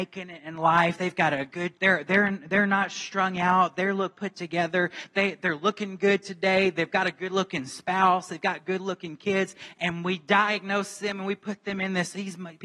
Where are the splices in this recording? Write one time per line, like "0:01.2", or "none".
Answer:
0:01.8
0:04.1
0:05.4